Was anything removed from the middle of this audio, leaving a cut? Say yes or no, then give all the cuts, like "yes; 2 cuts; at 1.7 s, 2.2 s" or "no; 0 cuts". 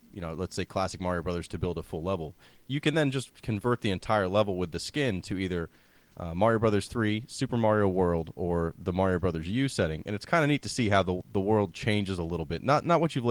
no; 0 cuts